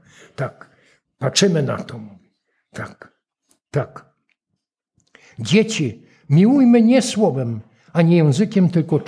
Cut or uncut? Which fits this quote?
uncut